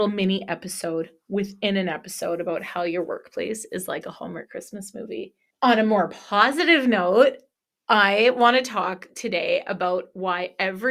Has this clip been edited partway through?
yes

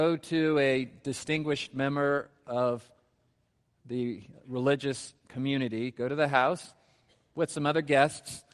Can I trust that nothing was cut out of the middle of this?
yes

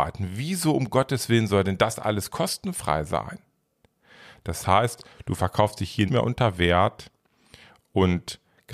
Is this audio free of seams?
no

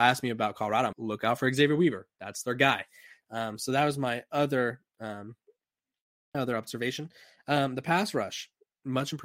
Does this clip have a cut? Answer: yes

